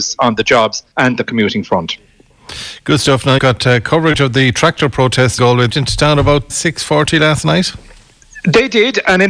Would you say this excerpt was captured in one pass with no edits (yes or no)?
no